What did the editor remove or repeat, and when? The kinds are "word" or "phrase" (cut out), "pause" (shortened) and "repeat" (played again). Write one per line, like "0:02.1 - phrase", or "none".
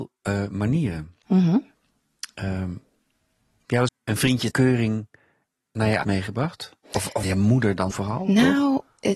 0:03.9 - word
0:04.5 - word
0:06.0 - word
0:07.2 - word
0:07.9 - word